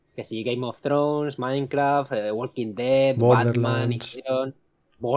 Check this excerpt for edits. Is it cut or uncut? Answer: uncut